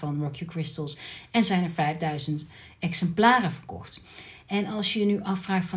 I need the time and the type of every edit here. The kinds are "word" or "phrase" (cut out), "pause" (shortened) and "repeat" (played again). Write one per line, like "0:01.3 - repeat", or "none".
none